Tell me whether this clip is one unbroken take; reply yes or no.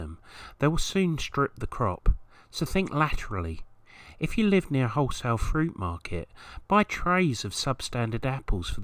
yes